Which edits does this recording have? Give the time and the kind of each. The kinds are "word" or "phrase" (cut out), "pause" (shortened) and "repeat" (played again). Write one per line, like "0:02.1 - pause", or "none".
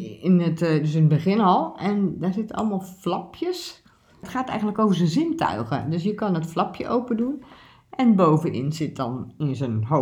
none